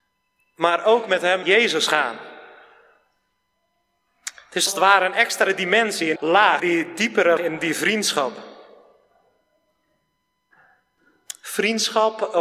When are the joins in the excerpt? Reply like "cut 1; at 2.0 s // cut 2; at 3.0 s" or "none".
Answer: cut 1; at 1.4 s // cut 2; at 4.7 s // cut 3; at 6.2 s // cut 4; at 6.6 s // cut 5; at 7.4 s